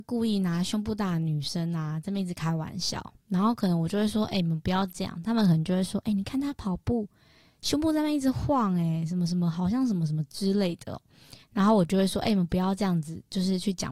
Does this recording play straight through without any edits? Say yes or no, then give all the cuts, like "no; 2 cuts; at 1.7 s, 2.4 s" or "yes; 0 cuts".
yes; 0 cuts